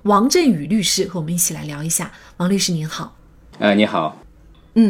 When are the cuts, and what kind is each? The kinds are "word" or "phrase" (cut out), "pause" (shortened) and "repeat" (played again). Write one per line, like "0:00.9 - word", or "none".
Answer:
none